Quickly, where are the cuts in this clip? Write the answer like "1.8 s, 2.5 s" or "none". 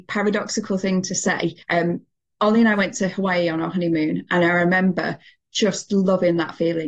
1.6 s